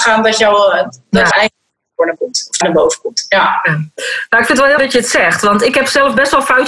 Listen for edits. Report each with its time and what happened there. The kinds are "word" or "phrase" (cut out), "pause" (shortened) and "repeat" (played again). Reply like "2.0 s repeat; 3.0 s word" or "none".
1.3 s word; 2.2 s word; 2.6 s word; 4.8 s word

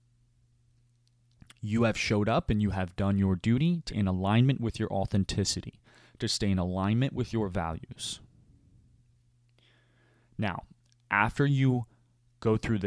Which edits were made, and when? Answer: 3.9 s word

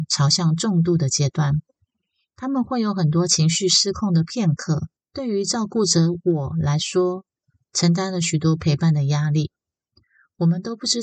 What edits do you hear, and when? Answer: 5.0 s pause

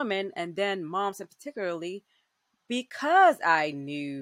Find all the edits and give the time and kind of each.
none

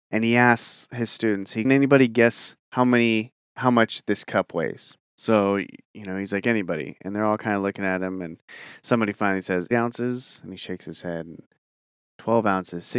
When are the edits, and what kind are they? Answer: 1.6 s phrase; 2.6 s pause; 5.1 s pause; 9.7 s word

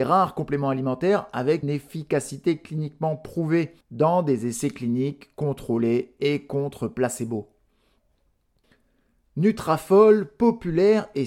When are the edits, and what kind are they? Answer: 1.6 s word; 3.8 s pause

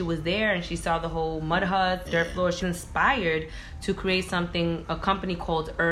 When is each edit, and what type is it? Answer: 2.0 s word; 2.6 s word

